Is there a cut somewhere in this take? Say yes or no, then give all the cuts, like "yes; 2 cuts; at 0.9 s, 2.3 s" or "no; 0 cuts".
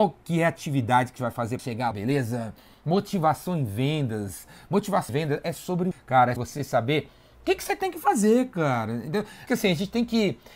yes; 7 cuts; at 1.2 s, 1.6 s, 1.9 s, 5.1 s, 5.9 s, 6.4 s, 9.5 s